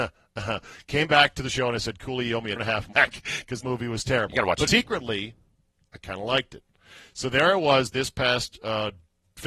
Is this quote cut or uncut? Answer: cut